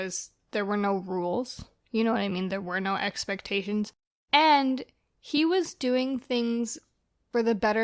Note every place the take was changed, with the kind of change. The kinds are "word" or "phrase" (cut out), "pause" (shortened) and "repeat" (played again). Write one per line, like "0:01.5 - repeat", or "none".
none